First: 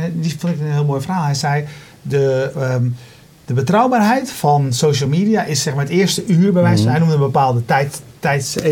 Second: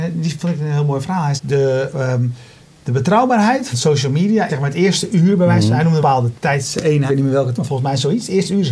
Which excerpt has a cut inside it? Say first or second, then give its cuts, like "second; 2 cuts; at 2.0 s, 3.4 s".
second; 7 cuts; at 1.4 s, 3.7 s, 4.5 s, 6.0 s, 6.3 s, 7.1 s, 7.6 s